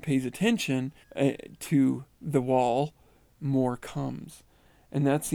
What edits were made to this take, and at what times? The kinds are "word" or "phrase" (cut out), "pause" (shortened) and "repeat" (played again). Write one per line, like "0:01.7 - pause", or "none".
0:01.0 - pause
0:02.1 - pause
0:03.4 - word